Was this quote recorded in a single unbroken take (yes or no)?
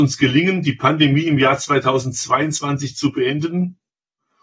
yes